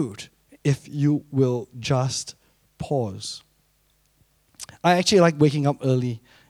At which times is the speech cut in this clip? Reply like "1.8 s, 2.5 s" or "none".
none